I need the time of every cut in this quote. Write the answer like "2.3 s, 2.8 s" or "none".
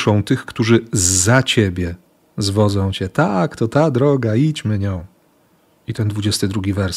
none